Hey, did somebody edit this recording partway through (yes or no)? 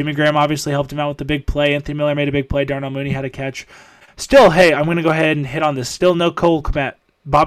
no